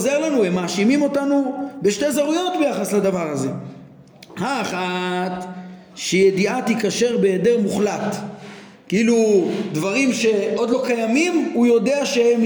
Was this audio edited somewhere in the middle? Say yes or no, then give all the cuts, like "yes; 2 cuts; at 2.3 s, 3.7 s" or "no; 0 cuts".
no; 0 cuts